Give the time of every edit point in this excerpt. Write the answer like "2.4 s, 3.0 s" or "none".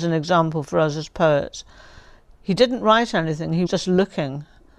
3.7 s